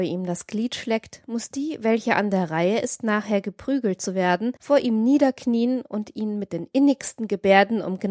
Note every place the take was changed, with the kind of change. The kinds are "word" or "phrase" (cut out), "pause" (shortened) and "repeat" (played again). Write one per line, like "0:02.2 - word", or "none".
0:04.6 - pause